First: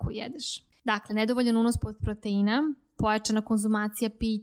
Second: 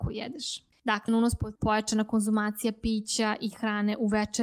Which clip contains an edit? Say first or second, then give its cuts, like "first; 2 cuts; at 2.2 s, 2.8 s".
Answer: second; 2 cuts; at 1.1 s, 1.6 s